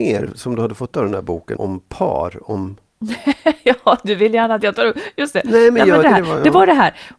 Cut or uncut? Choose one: cut